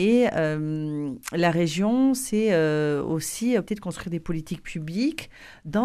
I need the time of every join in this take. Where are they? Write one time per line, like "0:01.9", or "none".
0:03.7

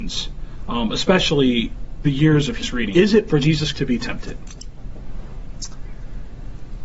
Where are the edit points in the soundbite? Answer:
0:02.0
0:02.6
0:02.9
0:03.3
0:03.7

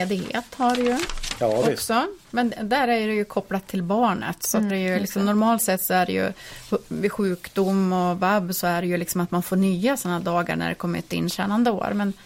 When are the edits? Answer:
0:04.7
0:11.1

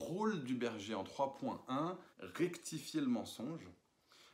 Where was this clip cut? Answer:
0:02.1

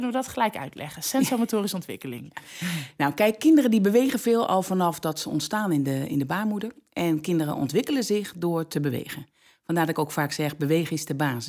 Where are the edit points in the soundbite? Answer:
none

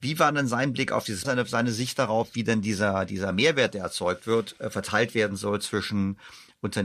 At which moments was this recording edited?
0:01.2

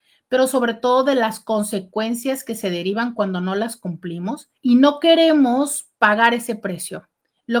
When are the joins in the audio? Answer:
0:04.6

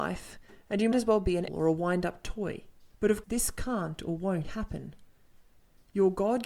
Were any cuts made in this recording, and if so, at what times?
0:00.9
0:01.5
0:02.9
0:03.2
0:04.4

